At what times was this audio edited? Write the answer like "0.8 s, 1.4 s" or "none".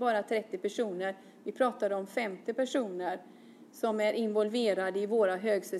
none